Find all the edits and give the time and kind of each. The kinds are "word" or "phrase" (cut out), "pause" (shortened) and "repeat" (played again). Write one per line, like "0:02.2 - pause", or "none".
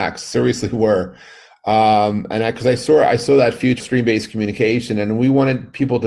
0:03.8 - word